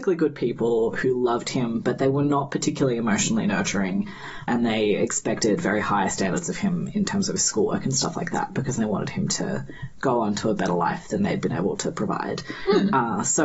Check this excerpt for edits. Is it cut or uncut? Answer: uncut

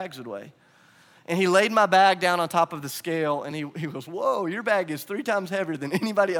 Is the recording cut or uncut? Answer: uncut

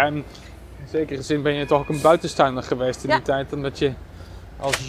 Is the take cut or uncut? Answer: uncut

